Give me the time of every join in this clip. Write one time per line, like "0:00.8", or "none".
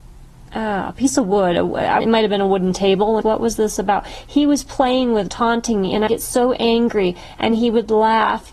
0:02.0
0:03.2
0:05.3
0:06.1